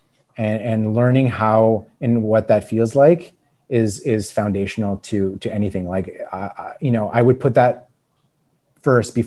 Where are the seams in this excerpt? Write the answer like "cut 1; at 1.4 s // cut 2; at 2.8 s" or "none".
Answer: none